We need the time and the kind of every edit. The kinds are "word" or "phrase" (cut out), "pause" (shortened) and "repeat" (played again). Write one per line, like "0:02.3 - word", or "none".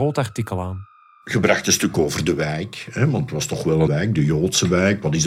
0:03.9 - word